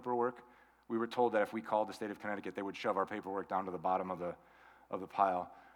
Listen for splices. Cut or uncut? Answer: uncut